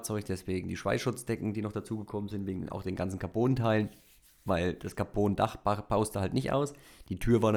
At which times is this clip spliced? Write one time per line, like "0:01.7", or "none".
none